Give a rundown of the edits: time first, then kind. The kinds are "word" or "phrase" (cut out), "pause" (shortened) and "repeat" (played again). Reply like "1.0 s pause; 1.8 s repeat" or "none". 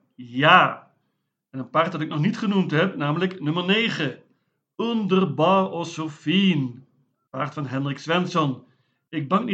none